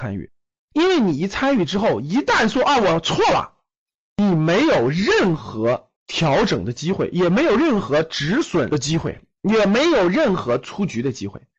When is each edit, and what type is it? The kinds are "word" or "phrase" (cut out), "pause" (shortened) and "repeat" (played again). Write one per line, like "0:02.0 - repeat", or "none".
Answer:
0:06.0 - pause